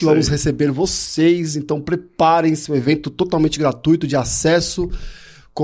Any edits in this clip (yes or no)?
no